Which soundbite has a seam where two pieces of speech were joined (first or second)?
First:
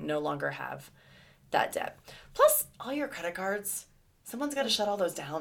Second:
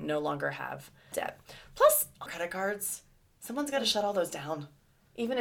second